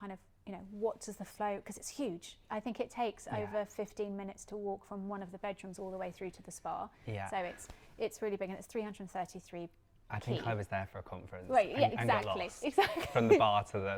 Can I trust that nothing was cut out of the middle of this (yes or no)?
yes